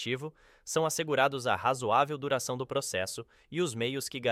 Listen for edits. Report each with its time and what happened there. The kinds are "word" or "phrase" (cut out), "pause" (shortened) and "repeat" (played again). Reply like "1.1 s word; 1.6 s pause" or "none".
none